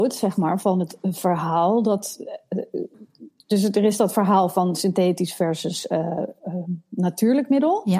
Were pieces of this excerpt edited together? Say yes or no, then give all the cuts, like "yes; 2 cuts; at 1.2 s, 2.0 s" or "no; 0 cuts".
no; 0 cuts